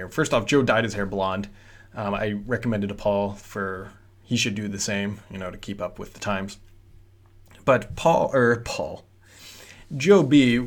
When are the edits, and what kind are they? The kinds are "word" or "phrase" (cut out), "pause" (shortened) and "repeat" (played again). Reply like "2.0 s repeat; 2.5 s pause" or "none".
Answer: none